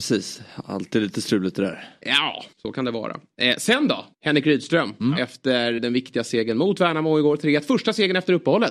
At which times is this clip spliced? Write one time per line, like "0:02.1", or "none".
0:02.5
0:04.1
0:05.8